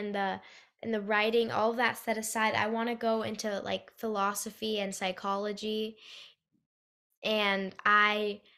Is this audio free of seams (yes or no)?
yes